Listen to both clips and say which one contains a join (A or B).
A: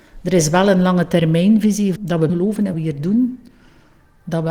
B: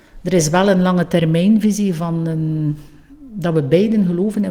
A